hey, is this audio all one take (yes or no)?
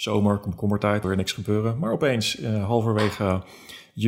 no